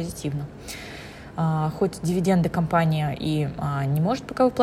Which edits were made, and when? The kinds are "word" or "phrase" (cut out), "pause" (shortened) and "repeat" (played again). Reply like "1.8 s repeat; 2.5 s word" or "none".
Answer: none